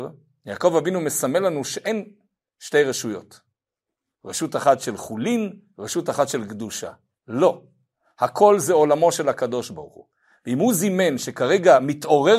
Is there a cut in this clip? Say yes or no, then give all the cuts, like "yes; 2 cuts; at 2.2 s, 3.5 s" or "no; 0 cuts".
no; 0 cuts